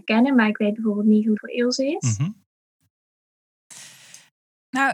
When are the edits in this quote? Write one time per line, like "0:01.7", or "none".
0:01.4